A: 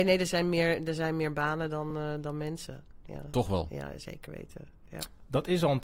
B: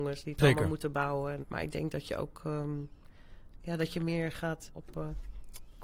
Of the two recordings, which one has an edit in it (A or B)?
B